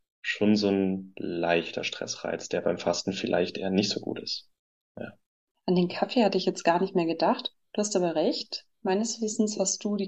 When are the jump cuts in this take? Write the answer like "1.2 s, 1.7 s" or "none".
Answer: none